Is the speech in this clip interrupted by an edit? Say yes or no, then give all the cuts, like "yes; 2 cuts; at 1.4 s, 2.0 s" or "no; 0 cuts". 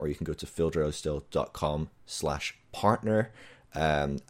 no; 0 cuts